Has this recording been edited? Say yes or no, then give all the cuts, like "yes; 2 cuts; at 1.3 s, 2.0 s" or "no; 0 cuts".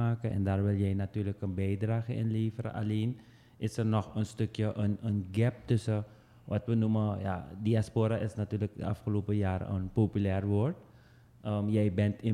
no; 0 cuts